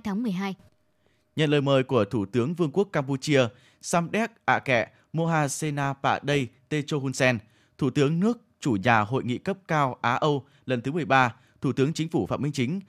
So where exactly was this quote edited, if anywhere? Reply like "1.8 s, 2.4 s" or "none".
none

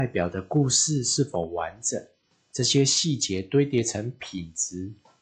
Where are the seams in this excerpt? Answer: none

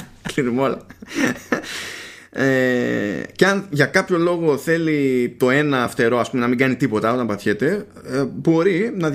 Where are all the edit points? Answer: none

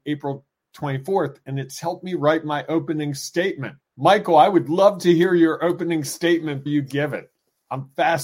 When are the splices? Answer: 3.9 s, 6.7 s

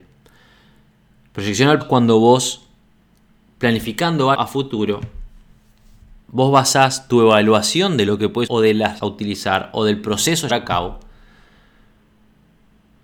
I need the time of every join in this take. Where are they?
1.8 s, 4.3 s, 6.2 s, 8.5 s, 9.0 s, 10.5 s

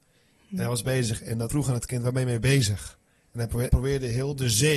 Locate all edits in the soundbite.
1.5 s, 3.1 s, 3.7 s

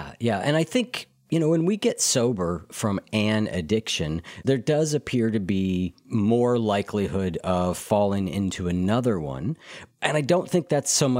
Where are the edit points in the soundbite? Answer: none

